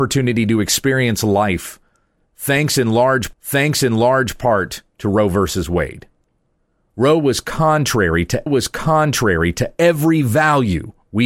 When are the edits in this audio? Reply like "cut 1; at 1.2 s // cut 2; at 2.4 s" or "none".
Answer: cut 1; at 3.3 s // cut 2; at 8.5 s